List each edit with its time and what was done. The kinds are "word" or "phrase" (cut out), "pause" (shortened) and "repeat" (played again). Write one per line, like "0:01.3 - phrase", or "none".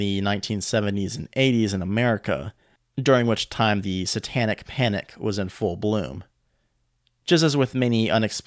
none